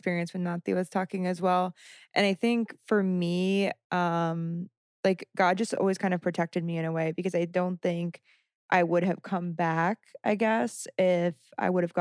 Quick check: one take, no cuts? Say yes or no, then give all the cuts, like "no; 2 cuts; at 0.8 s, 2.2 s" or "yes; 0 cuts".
yes; 0 cuts